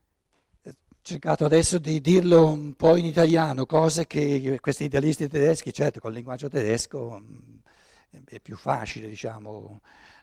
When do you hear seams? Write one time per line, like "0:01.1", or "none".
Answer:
none